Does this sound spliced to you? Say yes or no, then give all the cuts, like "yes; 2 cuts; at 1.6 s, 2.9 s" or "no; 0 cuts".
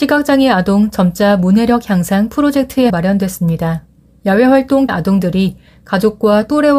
yes; 2 cuts; at 2.9 s, 4.9 s